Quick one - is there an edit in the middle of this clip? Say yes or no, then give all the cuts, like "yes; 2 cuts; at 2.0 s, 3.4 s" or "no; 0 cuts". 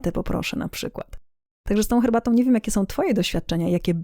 no; 0 cuts